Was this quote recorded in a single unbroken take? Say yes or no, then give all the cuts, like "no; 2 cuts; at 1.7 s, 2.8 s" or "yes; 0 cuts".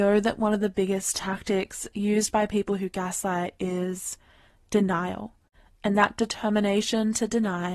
yes; 0 cuts